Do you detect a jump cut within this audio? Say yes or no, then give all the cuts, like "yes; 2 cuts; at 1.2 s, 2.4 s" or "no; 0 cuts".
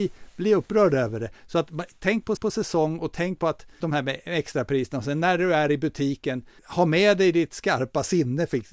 yes; 3 cuts; at 2.4 s, 3.8 s, 6.6 s